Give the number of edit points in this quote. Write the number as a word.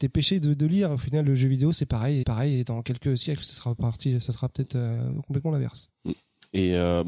one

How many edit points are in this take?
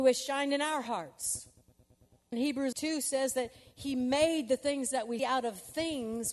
three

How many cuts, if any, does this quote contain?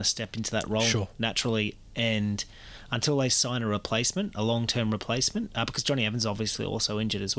zero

